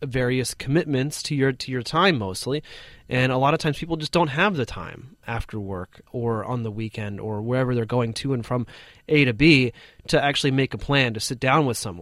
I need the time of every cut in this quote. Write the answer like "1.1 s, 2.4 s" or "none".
none

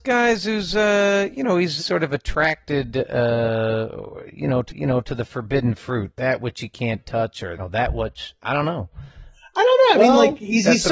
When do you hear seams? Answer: 1.8 s, 4.7 s, 7.6 s

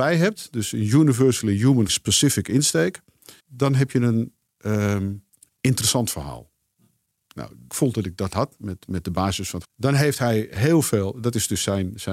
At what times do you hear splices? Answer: 1.9 s, 3.4 s, 5.3 s, 7.7 s, 8.6 s, 9.6 s

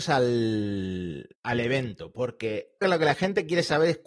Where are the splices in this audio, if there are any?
1.3 s, 2.8 s

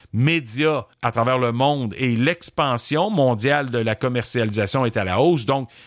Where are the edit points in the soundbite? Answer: 0.9 s

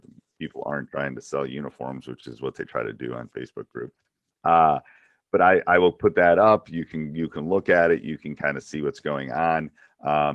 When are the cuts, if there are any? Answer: none

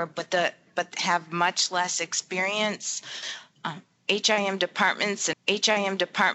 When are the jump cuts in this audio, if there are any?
5.3 s

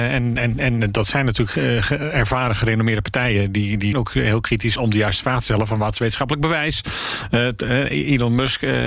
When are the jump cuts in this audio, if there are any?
3.9 s, 4.8 s

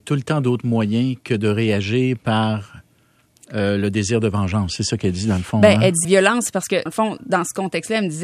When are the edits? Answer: 6.0 s, 6.9 s, 7.2 s

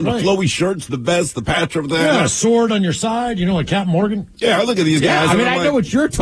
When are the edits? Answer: none

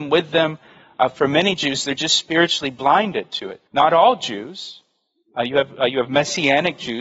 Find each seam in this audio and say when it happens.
3.7 s

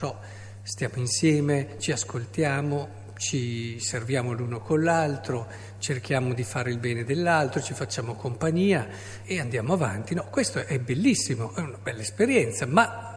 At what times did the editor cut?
9.2 s

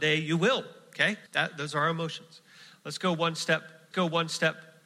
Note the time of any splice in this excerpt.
1.3 s, 3.9 s

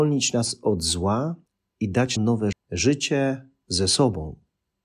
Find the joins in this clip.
1.5 s, 2.2 s, 2.5 s

